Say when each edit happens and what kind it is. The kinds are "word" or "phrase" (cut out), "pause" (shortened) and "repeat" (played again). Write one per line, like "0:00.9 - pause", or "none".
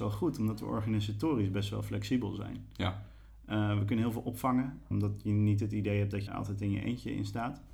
0:04.9 - word
0:06.3 - word